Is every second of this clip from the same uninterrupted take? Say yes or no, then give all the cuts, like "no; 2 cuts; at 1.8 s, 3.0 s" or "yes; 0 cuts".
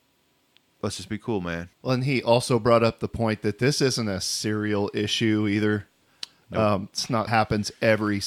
no; 2 cuts; at 1.7 s, 7.3 s